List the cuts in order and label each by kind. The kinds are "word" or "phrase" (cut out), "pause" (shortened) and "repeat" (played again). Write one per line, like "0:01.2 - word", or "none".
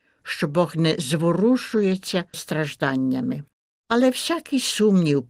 0:02.3 - word